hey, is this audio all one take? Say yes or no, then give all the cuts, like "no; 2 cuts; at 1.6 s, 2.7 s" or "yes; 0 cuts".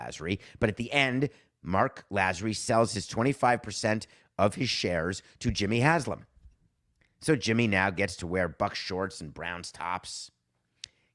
yes; 0 cuts